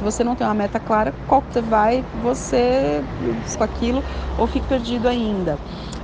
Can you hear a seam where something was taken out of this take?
yes; 3 cuts; at 1.5 s, 3.6 s, 4.6 s

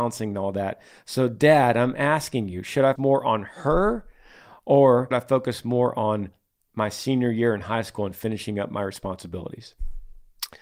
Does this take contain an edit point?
yes; 2 cuts; at 3.0 s, 5.1 s

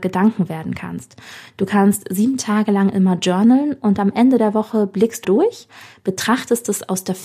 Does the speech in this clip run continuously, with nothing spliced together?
no; 1 cut; at 5.2 s

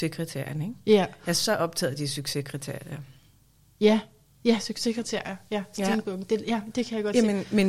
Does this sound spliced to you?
no; 0 cuts

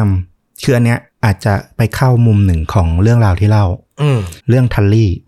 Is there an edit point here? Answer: yes; 1 cut; at 4.4 s

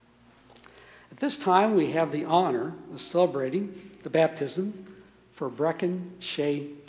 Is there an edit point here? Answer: no; 0 cuts

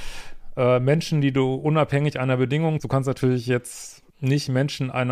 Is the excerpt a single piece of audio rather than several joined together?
no; 2 cuts; at 2.8 s, 4.1 s

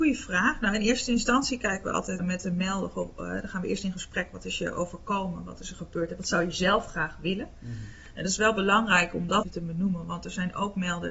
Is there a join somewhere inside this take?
yes; 2 cuts; at 2.2 s, 9.4 s

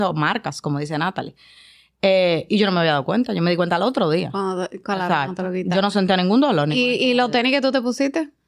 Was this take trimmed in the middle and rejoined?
no; 0 cuts

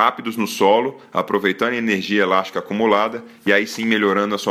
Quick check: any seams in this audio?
no; 0 cuts

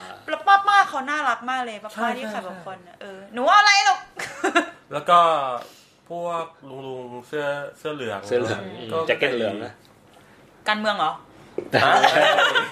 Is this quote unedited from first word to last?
yes; 0 cuts

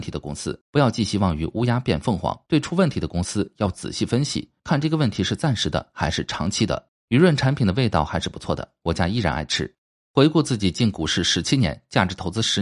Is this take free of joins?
no; 3 cuts; at 2.4 s, 7.0 s, 9.9 s

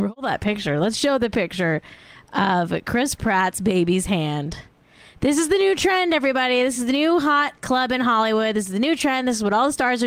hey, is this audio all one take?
yes; 0 cuts

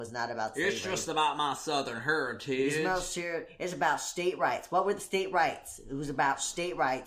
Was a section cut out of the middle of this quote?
no; 0 cuts

